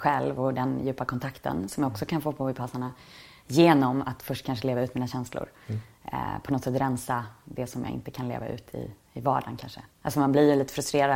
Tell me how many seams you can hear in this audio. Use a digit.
1